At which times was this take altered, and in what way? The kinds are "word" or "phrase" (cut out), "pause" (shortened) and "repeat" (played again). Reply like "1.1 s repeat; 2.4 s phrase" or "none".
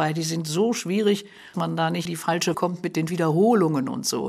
1.5 s word; 2.1 s word; 2.5 s word; 3.1 s word

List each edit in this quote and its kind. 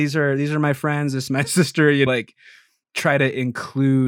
1.3 s phrase; 2.1 s word; 2.8 s word

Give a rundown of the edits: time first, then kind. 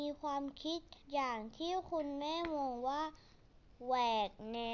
1.0 s pause

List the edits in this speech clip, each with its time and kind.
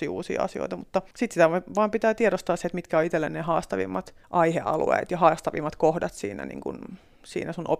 1.1 s pause; 4.2 s pause

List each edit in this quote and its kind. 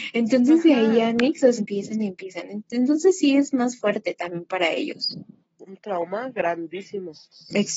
1.6 s phrase

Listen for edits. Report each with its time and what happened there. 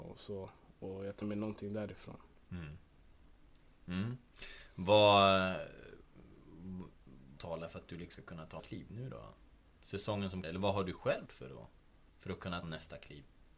1.2 s word; 7.4 s word; 8.2 s word; 8.6 s word; 10.4 s word; 11.3 s word; 12.6 s word

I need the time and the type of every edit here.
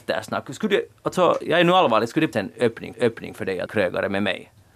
2.3 s phrase; 2.9 s repeat; 3.7 s word

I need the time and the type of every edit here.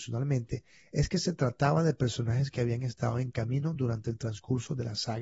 none

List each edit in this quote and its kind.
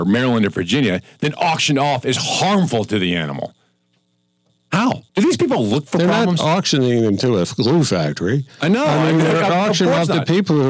5.1 s pause

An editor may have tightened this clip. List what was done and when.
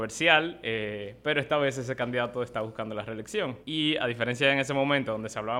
3.6 s pause

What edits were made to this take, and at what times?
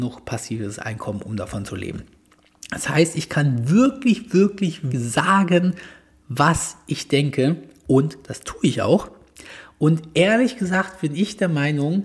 4.9 s word

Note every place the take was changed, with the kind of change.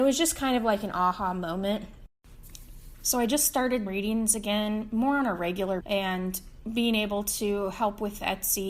3.9 s word; 5.8 s word; 6.6 s word

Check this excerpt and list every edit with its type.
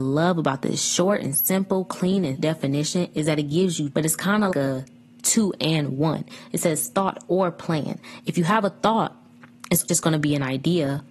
2.4 s word; 3.9 s word; 4.5 s word; 9.9 s word

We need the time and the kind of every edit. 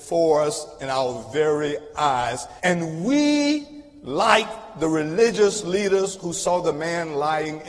2.6 s pause

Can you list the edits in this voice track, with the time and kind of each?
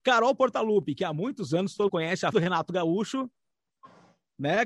1.9 s word; 2.3 s word

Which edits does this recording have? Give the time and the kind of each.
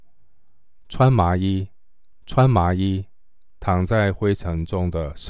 2.2 s repeat

